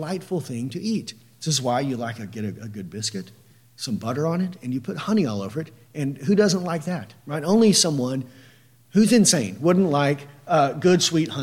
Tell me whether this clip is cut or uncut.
uncut